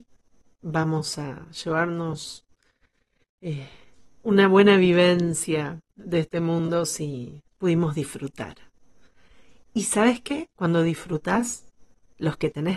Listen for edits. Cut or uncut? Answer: cut